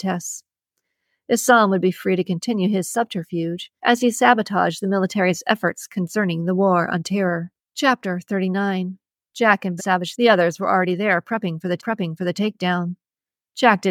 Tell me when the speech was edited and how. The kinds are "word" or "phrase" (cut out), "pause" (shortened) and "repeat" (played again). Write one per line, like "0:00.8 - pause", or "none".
0:03.8 - pause
0:07.6 - pause
0:09.2 - pause
0:09.8 - phrase
0:10.1 - word
0:11.8 - repeat